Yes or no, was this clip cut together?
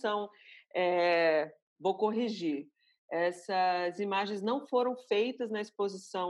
no